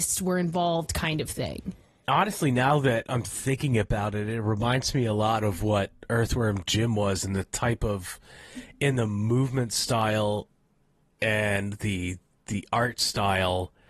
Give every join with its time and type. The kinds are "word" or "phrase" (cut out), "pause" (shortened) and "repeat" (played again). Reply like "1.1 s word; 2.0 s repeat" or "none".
none

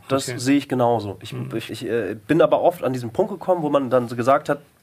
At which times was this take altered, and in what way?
1.7 s word

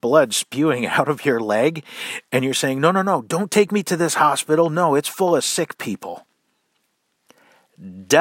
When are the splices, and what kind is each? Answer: none

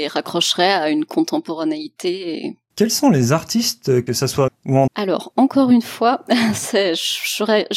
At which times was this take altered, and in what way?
4.1 s phrase; 4.5 s phrase; 4.9 s word

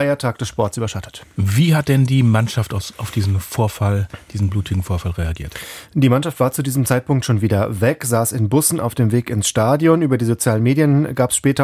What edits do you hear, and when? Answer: none

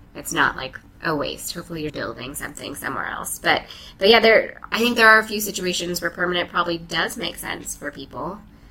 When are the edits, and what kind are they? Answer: 1.9 s word

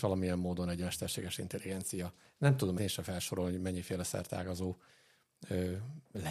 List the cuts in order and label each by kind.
2.8 s word

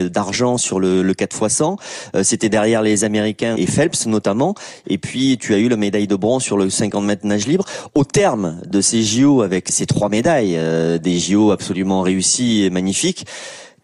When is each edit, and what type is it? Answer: 3.6 s word

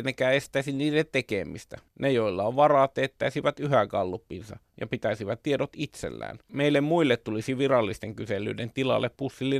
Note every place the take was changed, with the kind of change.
1.9 s pause; 6.4 s pause

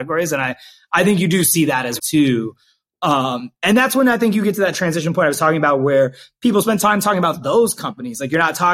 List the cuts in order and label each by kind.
2.0 s word

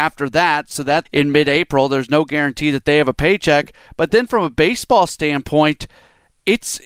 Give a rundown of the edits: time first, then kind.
1.1 s phrase

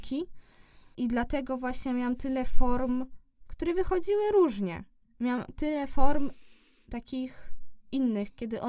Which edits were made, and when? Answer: none

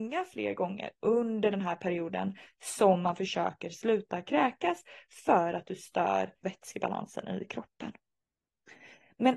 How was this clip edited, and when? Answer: 6.4 s word

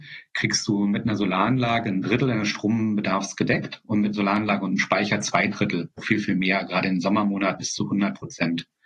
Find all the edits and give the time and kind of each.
4.1 s word; 6.0 s word; 7.6 s word

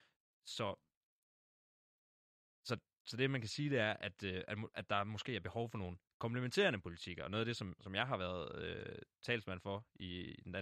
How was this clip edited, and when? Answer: 6.1 s pause

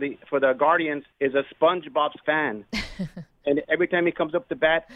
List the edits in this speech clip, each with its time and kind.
1.1 s pause; 2.2 s word

